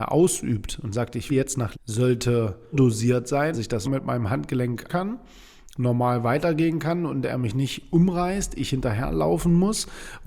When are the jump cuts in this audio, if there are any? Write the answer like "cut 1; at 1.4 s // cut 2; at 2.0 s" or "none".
cut 1; at 1.3 s // cut 2; at 1.7 s // cut 3; at 2.7 s // cut 4; at 3.5 s // cut 5; at 3.8 s // cut 6; at 4.9 s

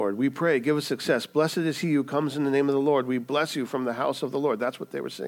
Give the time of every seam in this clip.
none

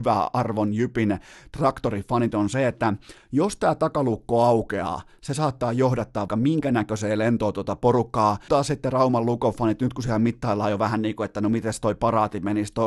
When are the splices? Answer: cut 1; at 6.3 s // cut 2; at 8.5 s

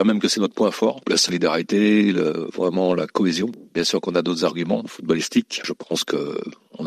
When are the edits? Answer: none

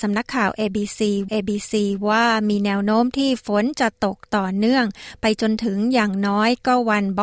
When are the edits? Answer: cut 1; at 1.3 s

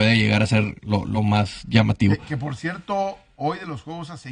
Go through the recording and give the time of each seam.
none

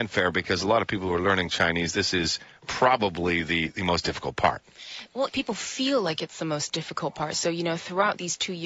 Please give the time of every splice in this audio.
cut 1; at 5.3 s

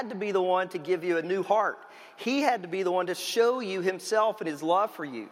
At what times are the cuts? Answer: none

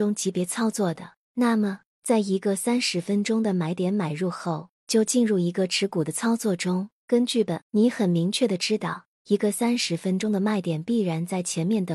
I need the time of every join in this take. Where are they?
cut 1; at 7.6 s

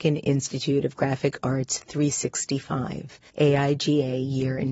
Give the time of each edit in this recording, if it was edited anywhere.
cut 1; at 3.3 s

